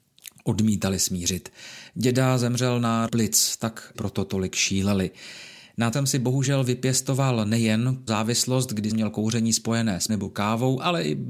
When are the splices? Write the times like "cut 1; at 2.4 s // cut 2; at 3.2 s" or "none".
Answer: cut 1; at 3.1 s // cut 2; at 3.9 s // cut 3; at 5.9 s // cut 4; at 8.1 s // cut 5; at 8.9 s // cut 6; at 10.1 s